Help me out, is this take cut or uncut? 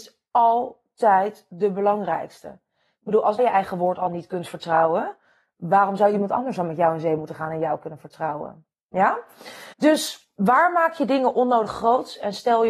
cut